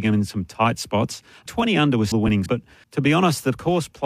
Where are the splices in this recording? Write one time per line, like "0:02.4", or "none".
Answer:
0:01.5
0:02.1
0:02.5
0:02.8